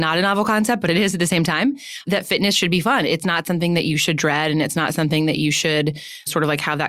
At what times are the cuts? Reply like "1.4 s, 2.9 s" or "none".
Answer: none